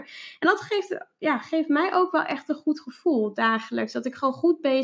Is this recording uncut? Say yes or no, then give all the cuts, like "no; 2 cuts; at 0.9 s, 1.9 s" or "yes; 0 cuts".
yes; 0 cuts